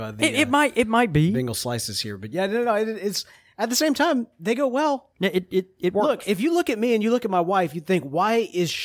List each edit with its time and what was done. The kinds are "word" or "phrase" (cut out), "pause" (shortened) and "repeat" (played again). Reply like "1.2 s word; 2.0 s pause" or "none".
5.1 s pause